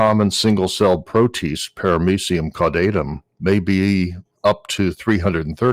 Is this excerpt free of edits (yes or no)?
no